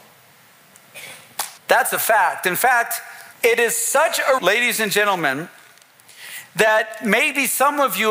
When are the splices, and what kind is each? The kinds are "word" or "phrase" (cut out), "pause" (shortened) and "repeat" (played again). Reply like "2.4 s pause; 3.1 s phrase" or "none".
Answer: 1.6 s pause; 3.3 s pause; 4.4 s word